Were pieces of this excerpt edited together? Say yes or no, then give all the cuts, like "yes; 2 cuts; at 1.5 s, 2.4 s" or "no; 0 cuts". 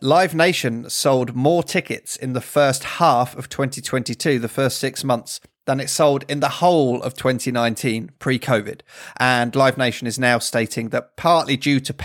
no; 0 cuts